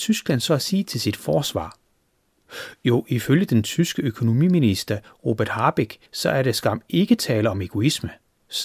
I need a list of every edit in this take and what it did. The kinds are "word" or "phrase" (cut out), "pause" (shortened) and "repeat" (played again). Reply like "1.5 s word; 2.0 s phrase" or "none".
6.1 s pause